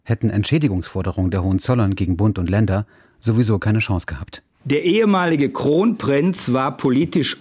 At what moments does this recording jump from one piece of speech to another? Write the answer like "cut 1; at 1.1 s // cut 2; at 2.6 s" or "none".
none